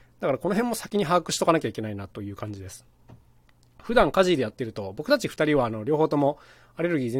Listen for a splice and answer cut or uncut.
uncut